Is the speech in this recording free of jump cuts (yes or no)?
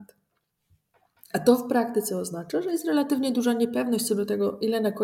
yes